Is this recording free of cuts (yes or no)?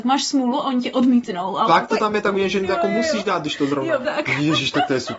no